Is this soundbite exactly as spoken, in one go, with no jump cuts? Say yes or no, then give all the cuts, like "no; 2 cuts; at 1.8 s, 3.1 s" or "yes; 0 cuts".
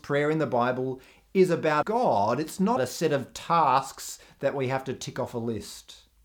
no; 2 cuts; at 1.8 s, 2.8 s